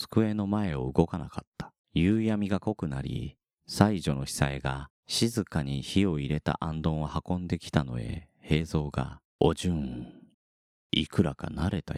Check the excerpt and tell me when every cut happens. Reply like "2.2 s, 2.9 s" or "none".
1.8 s, 3.4 s, 5.0 s, 9.3 s